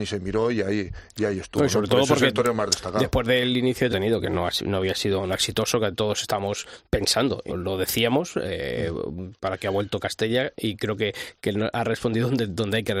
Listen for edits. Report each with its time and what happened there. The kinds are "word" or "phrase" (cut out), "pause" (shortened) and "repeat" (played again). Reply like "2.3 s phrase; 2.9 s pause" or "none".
3.9 s phrase; 5.3 s word; 7.5 s word; 9.4 s pause